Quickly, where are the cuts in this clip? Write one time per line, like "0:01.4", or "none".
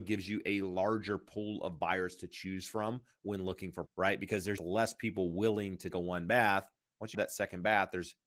0:03.9
0:04.6
0:05.9
0:07.1